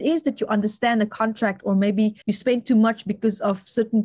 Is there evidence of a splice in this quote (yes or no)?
yes